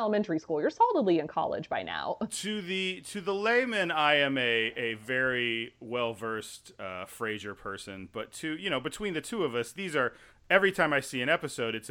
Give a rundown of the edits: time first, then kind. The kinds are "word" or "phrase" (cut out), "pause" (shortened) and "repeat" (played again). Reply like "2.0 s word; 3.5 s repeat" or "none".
none